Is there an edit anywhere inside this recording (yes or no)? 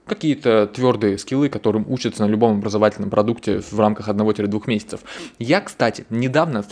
no